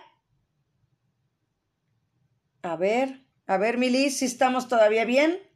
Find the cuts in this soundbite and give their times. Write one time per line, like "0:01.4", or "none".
0:03.3